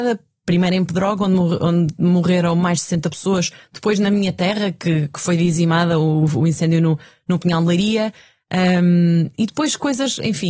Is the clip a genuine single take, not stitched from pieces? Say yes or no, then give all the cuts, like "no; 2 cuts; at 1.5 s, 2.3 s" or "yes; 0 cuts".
yes; 0 cuts